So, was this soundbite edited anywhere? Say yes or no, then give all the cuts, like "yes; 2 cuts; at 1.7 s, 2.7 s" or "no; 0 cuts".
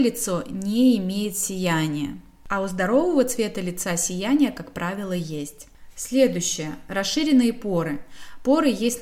no; 0 cuts